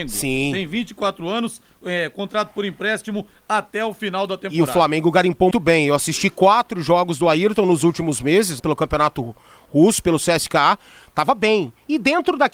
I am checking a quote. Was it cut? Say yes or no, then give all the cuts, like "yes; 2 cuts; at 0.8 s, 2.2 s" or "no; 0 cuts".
yes; 2 cuts; at 5.5 s, 8.6 s